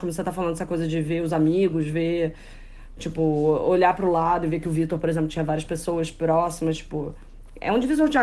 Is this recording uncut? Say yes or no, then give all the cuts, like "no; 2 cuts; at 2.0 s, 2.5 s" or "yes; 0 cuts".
yes; 0 cuts